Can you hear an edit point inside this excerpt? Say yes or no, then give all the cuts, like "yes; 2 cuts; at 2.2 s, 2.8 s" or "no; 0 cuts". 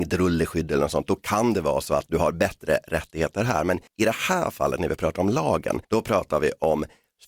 yes; 2 cuts; at 3.9 s, 5.8 s